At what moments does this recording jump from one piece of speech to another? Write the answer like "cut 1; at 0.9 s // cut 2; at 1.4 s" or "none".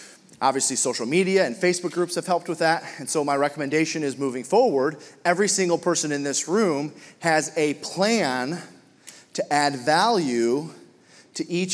none

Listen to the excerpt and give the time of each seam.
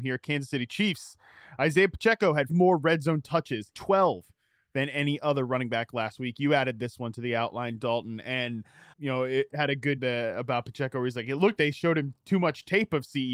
cut 1; at 2.5 s // cut 2; at 3.7 s // cut 3; at 8.9 s // cut 4; at 9.5 s // cut 5; at 10.0 s // cut 6; at 11.6 s

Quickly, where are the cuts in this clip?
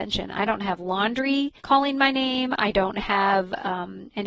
cut 1; at 1.6 s

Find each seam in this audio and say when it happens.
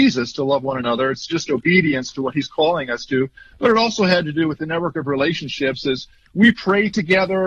none

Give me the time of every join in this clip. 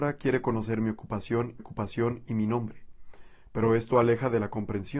cut 1; at 1.6 s

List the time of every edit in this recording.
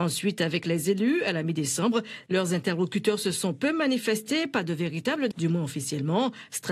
cut 1; at 5.3 s

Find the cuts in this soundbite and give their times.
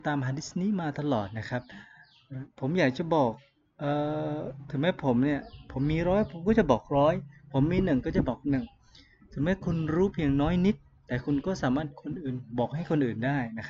none

